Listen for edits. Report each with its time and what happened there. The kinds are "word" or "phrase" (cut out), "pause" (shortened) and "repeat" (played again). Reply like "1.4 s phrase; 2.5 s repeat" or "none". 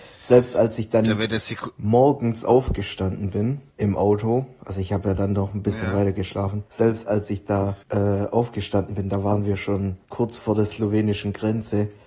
3.7 s pause; 6.7 s pause; 7.8 s pause; 10.0 s pause